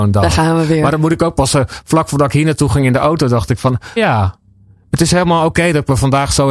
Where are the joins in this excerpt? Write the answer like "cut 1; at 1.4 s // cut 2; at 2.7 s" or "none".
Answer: cut 1; at 4.0 s